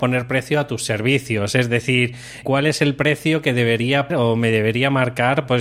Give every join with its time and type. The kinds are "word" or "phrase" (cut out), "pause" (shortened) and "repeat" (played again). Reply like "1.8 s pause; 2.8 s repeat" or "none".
2.4 s word; 4.1 s word